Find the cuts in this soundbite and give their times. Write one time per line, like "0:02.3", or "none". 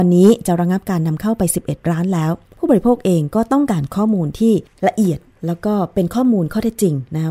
0:02.4
0:04.7